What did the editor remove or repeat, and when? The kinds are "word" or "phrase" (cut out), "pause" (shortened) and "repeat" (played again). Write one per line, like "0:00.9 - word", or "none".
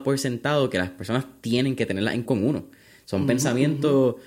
0:02.3 - word